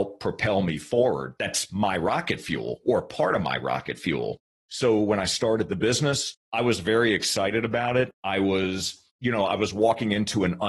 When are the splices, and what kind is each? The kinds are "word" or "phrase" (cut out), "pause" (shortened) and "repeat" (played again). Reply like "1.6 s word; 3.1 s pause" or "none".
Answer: 8.1 s pause; 9.1 s pause